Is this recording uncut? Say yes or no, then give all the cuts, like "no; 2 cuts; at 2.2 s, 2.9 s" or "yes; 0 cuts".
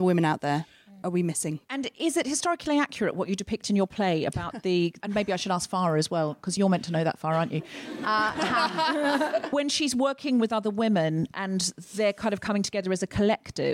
yes; 0 cuts